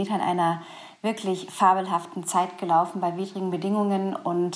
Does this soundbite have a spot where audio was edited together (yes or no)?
no